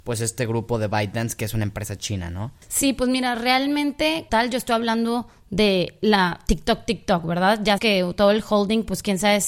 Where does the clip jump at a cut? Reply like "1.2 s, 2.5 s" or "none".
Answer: 4.3 s, 7.8 s

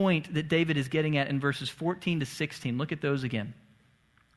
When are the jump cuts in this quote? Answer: none

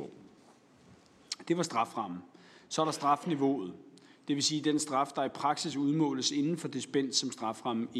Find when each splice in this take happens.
none

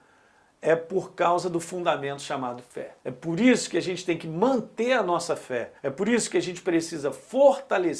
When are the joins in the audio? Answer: 3.0 s, 5.8 s

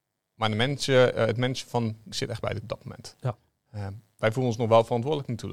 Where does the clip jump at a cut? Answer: 2.1 s, 2.6 s

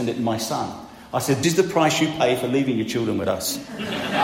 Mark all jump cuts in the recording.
1.4 s

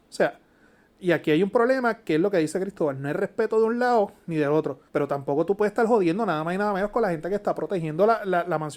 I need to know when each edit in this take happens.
4.9 s

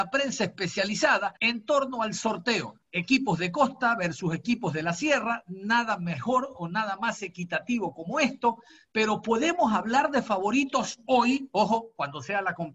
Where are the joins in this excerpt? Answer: 1.4 s, 2.8 s

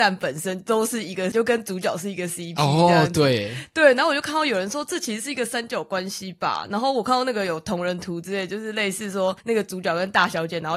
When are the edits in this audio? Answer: 1.3 s, 9.4 s

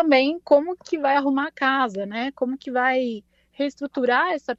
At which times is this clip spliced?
none

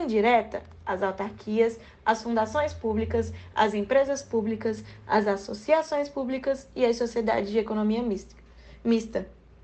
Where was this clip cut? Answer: none

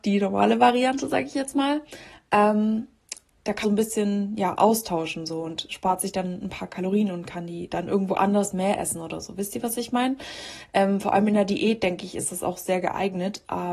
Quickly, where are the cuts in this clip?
3.6 s

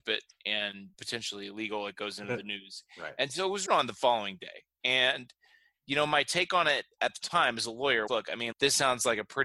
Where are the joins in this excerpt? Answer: 0.9 s, 3.7 s, 8.1 s, 8.5 s

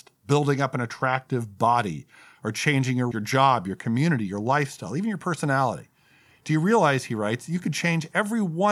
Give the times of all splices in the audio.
3.1 s

